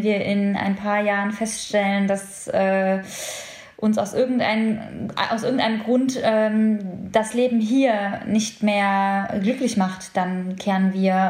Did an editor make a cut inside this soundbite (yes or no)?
no